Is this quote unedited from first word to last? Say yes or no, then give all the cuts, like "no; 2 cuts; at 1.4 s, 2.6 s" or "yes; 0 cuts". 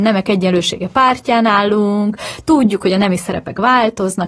yes; 0 cuts